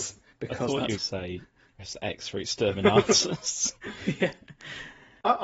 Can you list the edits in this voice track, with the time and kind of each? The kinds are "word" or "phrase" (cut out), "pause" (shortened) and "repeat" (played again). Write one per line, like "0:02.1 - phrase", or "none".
0:01.0 - phrase
0:01.7 - word